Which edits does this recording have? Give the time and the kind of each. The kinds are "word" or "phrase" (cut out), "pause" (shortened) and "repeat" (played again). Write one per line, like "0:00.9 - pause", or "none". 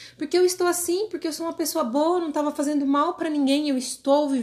none